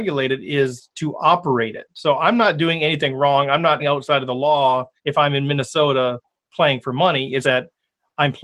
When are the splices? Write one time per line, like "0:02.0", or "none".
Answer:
0:03.8
0:05.0
0:07.4

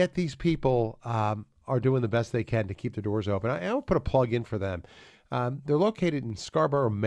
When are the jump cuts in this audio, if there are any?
none

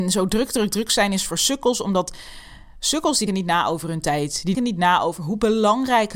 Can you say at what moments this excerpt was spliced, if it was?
0:03.3
0:04.5

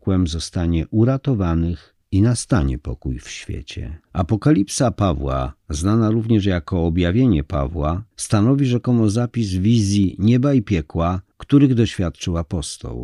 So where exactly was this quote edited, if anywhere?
0:02.0
0:04.0
0:08.1
0:11.3

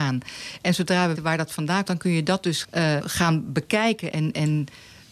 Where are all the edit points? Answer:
0:01.2
0:01.9
0:02.6
0:03.0
0:04.1

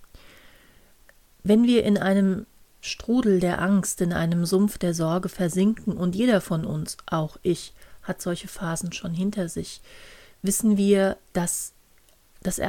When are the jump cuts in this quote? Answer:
none

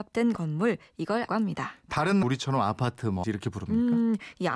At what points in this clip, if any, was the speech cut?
0:01.3
0:02.2
0:03.2

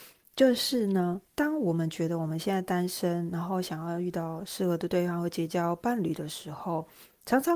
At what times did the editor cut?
0:01.3

